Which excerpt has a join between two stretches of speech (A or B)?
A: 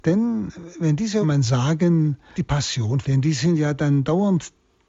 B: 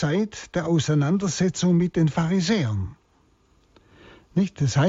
A